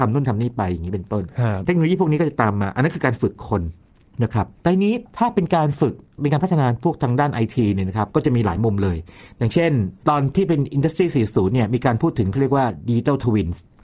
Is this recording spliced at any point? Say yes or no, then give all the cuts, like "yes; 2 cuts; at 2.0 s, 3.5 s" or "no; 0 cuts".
yes; 1 cut; at 10.0 s